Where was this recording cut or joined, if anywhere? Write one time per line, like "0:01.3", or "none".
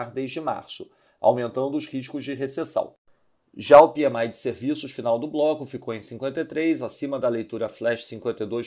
none